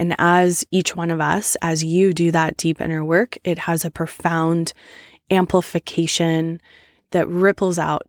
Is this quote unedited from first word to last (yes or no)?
yes